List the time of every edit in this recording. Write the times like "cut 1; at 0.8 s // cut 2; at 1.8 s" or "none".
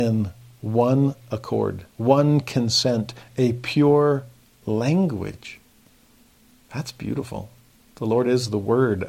cut 1; at 1.9 s